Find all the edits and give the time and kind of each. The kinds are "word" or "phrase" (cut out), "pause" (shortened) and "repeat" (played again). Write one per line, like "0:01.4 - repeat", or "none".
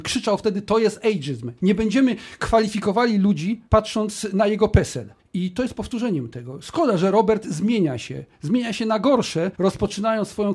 0:01.6 - pause
0:03.7 - pause
0:05.2 - pause
0:09.5 - pause